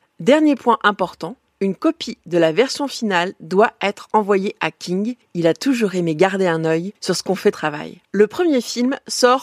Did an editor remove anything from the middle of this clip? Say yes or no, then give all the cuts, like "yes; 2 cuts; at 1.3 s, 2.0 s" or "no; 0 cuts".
yes; 3 cuts; at 7.0 s, 7.5 s, 8.0 s